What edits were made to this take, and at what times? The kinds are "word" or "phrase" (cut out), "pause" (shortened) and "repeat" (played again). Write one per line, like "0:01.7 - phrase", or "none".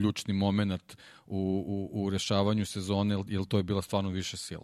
none